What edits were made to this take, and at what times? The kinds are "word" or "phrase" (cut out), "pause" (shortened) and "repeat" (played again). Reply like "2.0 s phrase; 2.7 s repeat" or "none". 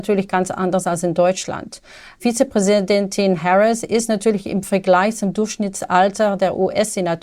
none